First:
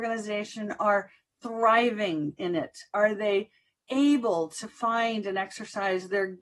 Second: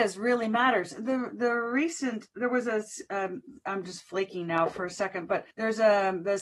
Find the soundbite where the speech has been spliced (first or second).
second